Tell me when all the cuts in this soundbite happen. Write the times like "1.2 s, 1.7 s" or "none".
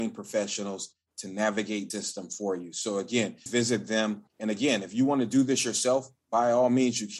1.9 s, 3.5 s, 4.3 s